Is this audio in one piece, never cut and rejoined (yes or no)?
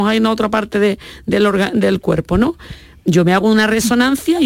yes